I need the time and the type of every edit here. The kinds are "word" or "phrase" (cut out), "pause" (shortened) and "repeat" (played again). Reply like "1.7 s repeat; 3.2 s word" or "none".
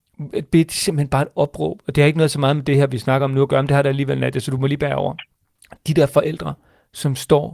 none